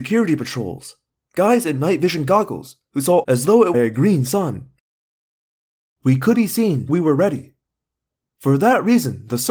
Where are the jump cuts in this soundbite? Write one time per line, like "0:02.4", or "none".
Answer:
0:03.2
0:03.7
0:06.3
0:06.9